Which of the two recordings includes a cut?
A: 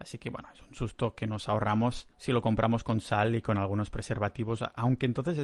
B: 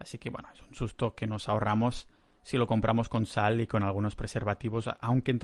A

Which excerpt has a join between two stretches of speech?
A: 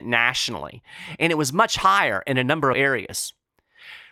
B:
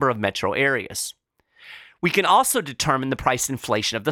A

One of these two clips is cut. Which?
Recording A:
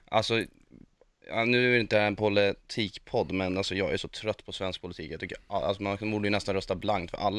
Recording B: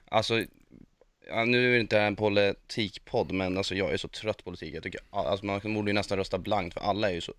B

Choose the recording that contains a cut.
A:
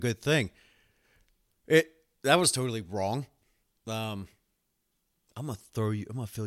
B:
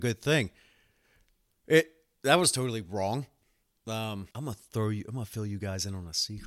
B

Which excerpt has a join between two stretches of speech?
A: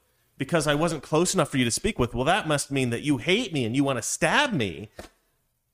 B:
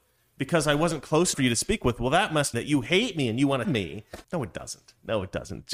B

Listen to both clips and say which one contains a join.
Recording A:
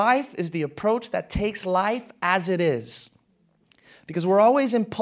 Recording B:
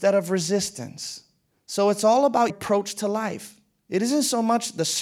B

